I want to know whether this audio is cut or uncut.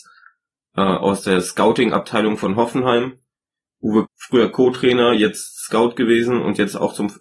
cut